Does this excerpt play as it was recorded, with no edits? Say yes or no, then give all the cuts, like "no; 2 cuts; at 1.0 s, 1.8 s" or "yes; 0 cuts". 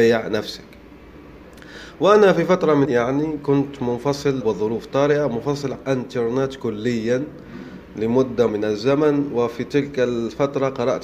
no; 4 cuts; at 2.8 s, 4.4 s, 5.7 s, 8.5 s